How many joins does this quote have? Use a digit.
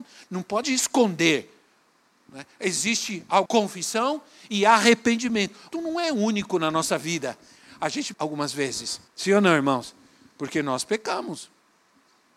4